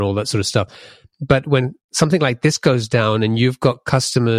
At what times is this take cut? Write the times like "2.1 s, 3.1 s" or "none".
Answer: none